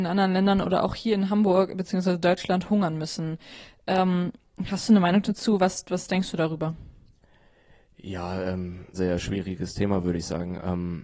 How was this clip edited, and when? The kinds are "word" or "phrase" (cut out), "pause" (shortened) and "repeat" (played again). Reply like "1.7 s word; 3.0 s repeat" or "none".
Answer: 8.9 s word

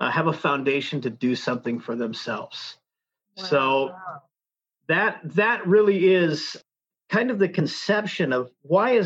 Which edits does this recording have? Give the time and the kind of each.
none

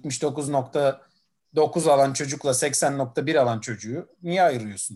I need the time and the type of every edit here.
none

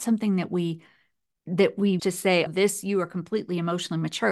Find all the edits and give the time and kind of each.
2.0 s word; 2.5 s word

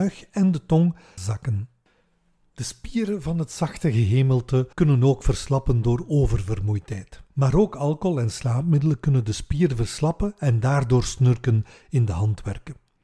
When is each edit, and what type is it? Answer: 1.2 s phrase; 4.7 s pause; 7.3 s pause

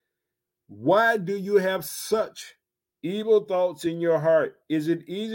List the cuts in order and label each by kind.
2.9 s pause

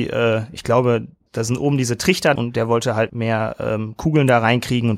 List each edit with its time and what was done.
1.3 s word; 2.4 s word; 3.1 s word

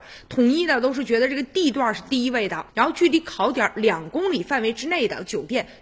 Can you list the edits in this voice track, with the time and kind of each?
2.7 s pause

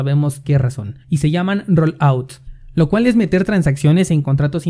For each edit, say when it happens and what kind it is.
1.0 s pause

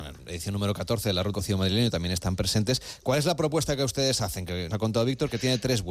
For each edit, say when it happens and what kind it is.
1.3 s word; 4.7 s word

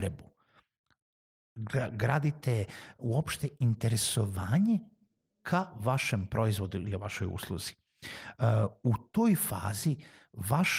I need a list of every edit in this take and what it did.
none

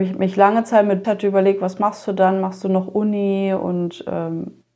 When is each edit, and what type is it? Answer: 1.0 s word

